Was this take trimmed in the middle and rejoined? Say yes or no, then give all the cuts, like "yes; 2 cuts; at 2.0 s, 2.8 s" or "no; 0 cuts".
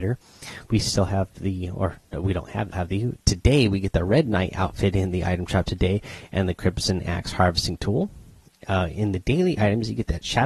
yes; 1 cut; at 2.7 s